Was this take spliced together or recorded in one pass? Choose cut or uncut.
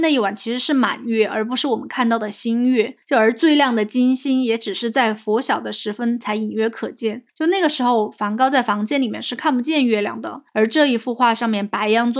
cut